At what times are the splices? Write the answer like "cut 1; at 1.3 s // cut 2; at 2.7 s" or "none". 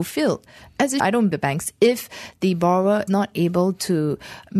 cut 1; at 1.0 s // cut 2; at 1.3 s // cut 3; at 3.1 s